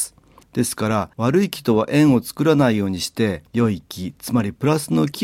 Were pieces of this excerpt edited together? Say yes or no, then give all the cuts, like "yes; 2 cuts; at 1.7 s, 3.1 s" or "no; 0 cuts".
yes; 2 cuts; at 1.1 s, 3.5 s